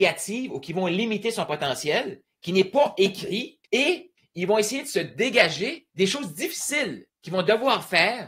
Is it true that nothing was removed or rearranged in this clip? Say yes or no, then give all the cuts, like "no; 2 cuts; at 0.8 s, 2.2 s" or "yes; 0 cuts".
no; 2 cuts; at 3.6 s, 5.9 s